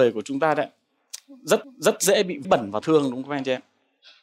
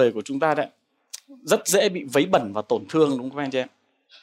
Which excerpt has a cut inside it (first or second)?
first